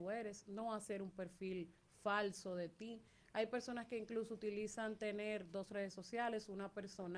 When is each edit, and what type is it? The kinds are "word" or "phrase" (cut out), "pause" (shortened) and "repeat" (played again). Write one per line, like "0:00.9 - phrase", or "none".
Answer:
none